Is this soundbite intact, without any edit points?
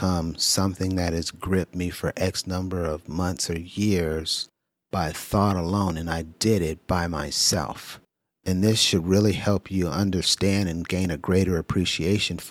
yes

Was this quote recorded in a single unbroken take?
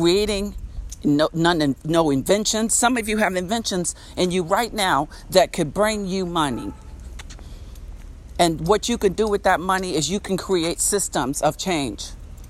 yes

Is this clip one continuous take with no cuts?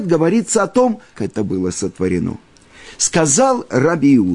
no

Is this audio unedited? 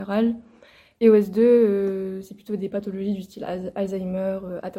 yes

